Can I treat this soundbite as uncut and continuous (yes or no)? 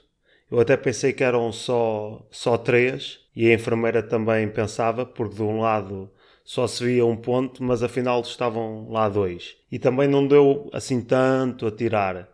no